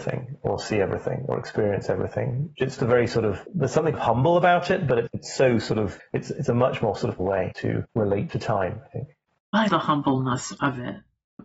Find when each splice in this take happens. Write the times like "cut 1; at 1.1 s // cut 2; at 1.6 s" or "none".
cut 1; at 2.8 s // cut 2; at 3.9 s // cut 3; at 5.1 s // cut 4; at 7.2 s // cut 5; at 8.3 s // cut 6; at 9.7 s